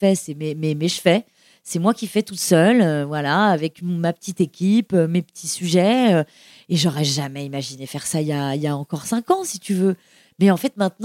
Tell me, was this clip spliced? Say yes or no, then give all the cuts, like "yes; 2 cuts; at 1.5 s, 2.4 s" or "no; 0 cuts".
no; 0 cuts